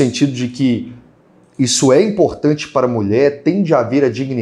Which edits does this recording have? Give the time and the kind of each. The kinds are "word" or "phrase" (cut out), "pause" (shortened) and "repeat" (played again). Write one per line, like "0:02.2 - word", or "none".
none